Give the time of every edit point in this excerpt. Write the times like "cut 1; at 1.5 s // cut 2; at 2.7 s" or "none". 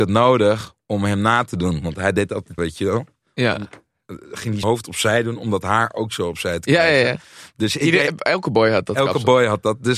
cut 1; at 2.6 s // cut 2; at 4.6 s

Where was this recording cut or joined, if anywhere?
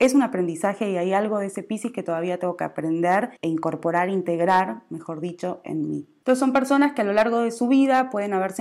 cut 1; at 3.4 s

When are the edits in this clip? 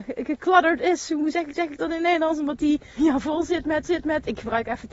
cut 1; at 1.5 s // cut 2; at 3.0 s // cut 3; at 3.8 s

